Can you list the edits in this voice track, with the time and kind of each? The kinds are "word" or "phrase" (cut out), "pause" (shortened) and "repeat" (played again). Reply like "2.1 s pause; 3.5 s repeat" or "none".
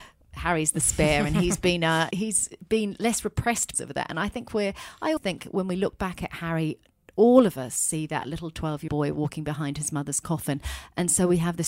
2.1 s word; 3.7 s word; 5.2 s word; 8.9 s word